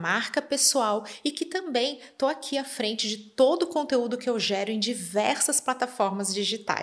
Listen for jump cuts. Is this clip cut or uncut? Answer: uncut